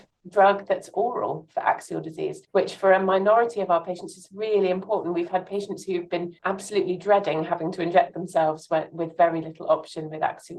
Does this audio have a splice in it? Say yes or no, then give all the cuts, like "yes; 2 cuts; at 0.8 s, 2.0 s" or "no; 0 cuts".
yes; 2 cuts; at 2.4 s, 6.4 s